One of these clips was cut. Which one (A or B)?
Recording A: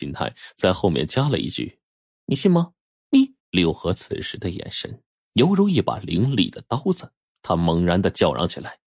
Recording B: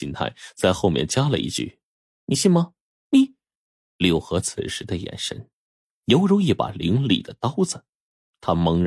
A